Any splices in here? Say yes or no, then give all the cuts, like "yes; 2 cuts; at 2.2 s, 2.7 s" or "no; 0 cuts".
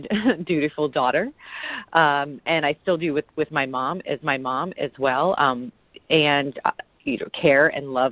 yes; 1 cut; at 4.2 s